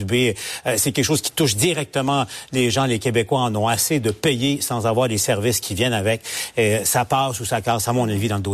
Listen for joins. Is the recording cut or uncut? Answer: uncut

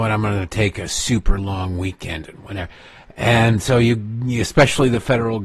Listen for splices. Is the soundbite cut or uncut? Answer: uncut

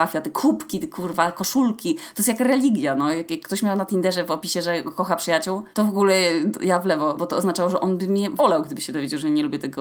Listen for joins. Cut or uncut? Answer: cut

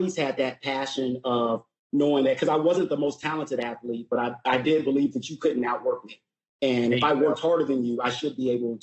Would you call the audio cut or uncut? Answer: uncut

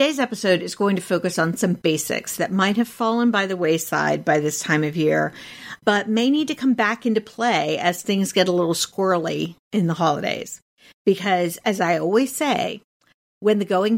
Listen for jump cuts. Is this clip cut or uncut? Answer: uncut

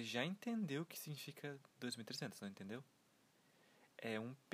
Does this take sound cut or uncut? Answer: cut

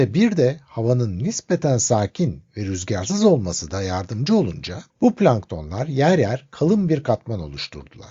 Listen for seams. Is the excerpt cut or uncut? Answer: cut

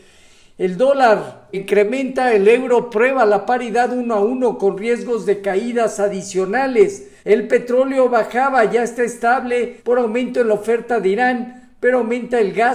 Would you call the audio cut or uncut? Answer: cut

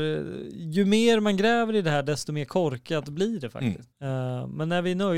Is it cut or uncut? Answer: cut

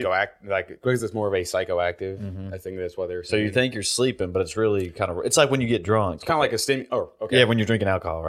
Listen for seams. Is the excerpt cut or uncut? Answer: uncut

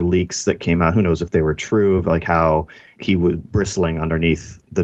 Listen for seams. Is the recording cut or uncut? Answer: uncut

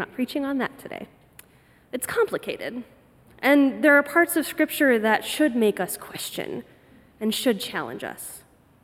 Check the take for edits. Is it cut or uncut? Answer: cut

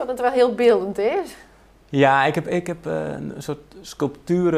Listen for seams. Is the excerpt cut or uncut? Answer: uncut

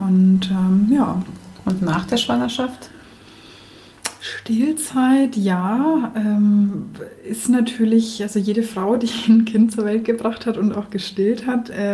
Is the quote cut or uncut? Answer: uncut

